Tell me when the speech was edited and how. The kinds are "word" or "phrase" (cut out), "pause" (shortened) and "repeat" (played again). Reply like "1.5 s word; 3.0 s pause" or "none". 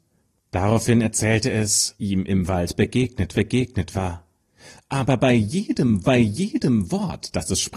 2.0 s word; 3.3 s repeat; 6.0 s repeat

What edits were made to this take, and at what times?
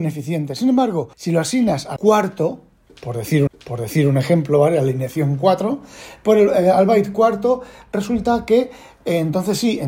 1.1 s pause; 2.0 s word; 3.5 s repeat

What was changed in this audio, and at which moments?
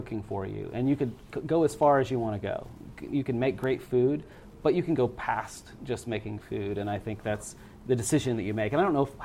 6.4 s word

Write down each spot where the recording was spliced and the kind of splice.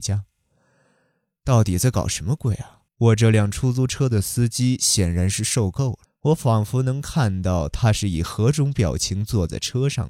2.9 s pause; 6.1 s pause

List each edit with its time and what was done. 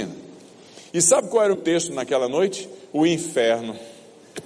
1.5 s word

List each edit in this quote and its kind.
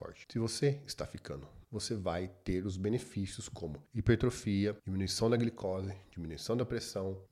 1.6 s phrase

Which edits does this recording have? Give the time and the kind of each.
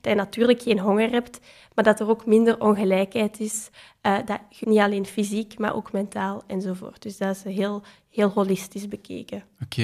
4.6 s phrase

